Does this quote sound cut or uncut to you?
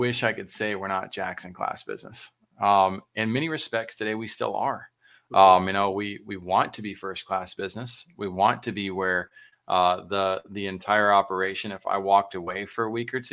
uncut